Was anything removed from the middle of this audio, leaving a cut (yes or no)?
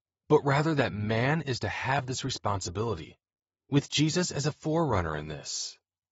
no